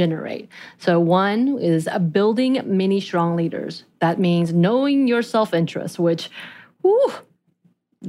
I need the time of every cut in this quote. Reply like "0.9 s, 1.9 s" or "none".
none